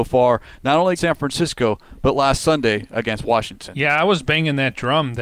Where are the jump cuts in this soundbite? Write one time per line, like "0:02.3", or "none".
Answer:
0:01.0